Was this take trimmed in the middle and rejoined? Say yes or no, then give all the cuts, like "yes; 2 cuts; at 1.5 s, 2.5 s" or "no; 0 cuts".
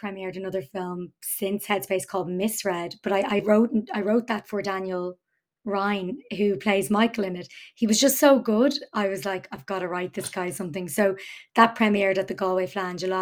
no; 0 cuts